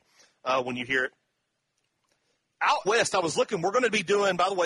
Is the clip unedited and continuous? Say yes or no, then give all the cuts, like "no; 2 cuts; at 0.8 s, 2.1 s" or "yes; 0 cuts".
no; 1 cut; at 2.8 s